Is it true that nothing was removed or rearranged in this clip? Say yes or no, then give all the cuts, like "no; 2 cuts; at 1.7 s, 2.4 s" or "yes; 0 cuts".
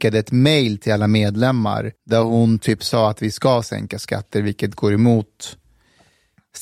no; 1 cut; at 2.0 s